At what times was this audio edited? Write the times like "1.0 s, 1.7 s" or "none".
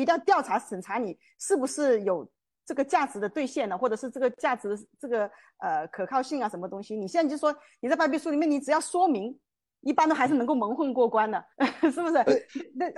11.5 s